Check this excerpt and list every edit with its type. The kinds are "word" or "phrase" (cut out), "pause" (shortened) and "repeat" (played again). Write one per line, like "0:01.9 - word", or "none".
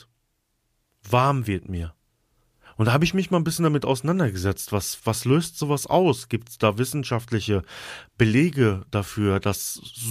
0:02.5 - pause
0:05.0 - word